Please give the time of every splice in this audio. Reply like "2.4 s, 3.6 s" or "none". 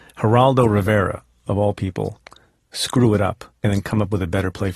none